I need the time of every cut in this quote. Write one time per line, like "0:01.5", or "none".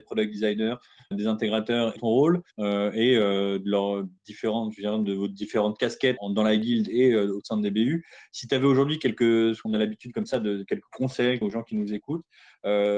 0:01.1
0:02.0
0:02.5
0:04.2
0:06.2
0:09.7
0:11.4